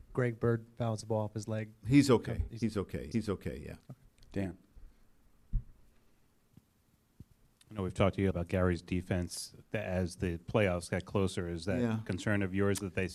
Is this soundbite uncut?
no; 3 cuts; at 3.1 s, 4.1 s, 8.3 s

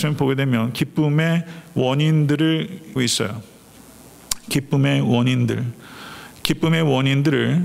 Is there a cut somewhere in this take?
yes; 1 cut; at 3.0 s

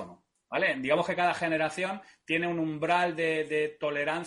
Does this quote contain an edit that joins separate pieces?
no; 0 cuts

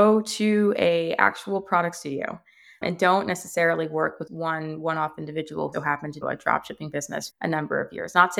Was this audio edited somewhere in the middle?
yes; 5 cuts; at 2.8 s, 4.3 s, 5.7 s, 6.2 s, 7.3 s

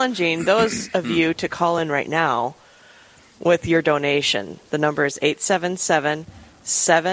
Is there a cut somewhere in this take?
no; 0 cuts

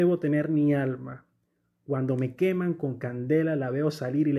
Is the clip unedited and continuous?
yes; 0 cuts

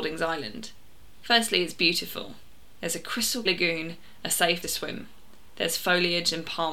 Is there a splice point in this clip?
yes; 2 cuts; at 3.5 s, 4.6 s

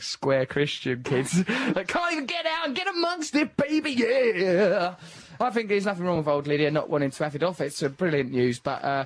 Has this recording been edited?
no; 0 cuts

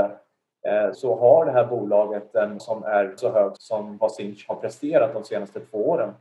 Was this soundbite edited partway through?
yes; 4 cuts; at 0.9 s, 2.6 s, 3.2 s, 3.6 s

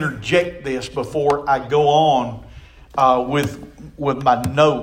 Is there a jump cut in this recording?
no; 0 cuts

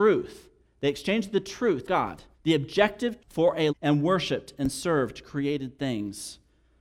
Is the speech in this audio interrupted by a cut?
yes; 4 cuts; at 1.9 s, 2.3 s, 3.2 s, 3.7 s

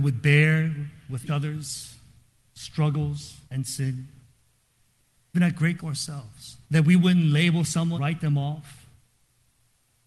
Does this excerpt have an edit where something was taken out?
yes; 6 cuts; at 1.3 s, 3.4 s, 5.3 s, 5.8 s, 6.6 s, 7.9 s

